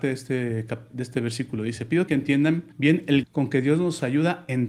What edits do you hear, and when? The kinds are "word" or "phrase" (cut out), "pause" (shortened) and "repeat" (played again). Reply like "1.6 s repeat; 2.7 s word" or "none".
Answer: 2.1 s word; 2.7 s pause; 3.2 s phrase